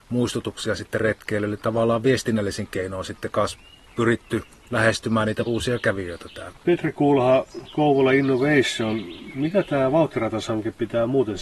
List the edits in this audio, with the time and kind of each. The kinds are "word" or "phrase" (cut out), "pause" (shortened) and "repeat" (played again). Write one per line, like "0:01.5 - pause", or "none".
0:05.5 - word

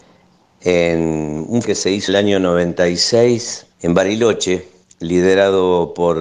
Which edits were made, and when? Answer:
0:01.6 - word
0:02.1 - phrase
0:03.7 - pause
0:04.8 - pause

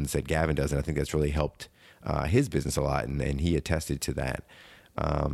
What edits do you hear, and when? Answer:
none

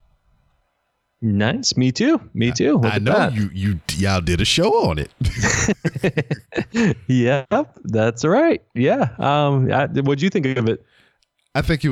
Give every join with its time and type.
none

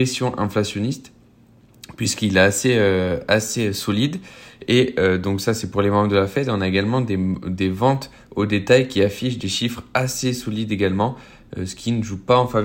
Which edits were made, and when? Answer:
none

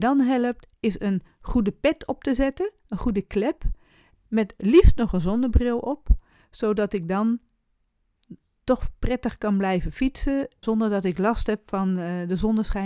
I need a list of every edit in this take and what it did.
0:10.6 - word

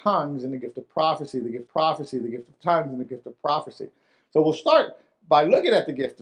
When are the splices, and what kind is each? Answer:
0:01.7 - repeat

